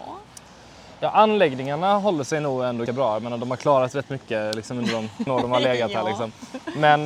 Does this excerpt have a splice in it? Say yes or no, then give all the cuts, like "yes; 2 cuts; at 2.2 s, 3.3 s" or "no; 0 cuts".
yes; 2 cuts; at 2.9 s, 5.3 s